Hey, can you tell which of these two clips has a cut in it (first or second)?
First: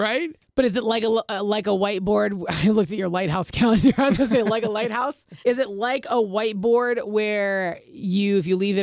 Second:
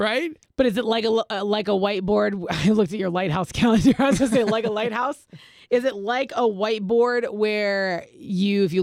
first